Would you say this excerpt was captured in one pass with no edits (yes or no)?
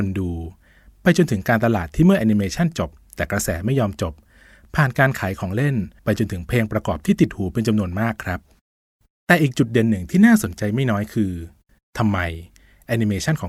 no